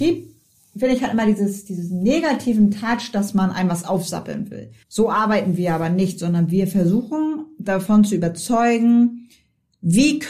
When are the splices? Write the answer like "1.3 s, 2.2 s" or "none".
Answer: 4.8 s